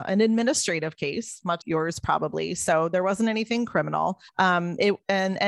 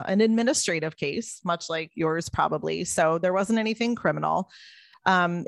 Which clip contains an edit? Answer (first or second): first